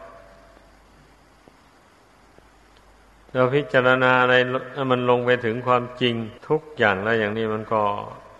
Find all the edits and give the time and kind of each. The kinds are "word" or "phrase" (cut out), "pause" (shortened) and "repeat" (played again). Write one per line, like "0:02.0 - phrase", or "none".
0:06.4 - pause

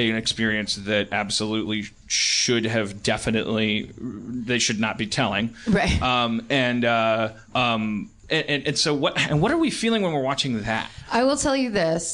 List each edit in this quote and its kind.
0:07.4 - pause

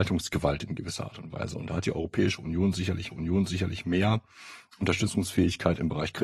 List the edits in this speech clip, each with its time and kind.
0:03.1 - repeat

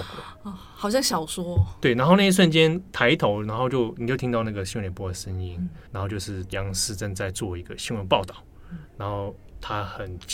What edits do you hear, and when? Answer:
0:05.9 - pause

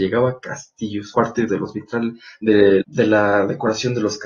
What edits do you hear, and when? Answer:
0:01.1 - word
0:01.5 - word
0:02.8 - word

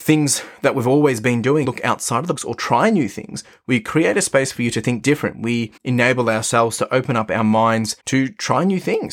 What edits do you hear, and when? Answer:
0:01.6 - word
0:02.4 - word
0:05.8 - pause
0:08.0 - pause

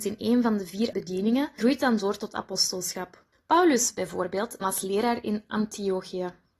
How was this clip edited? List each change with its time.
0:00.9 - word
0:01.6 - word
0:03.3 - pause
0:04.6 - word

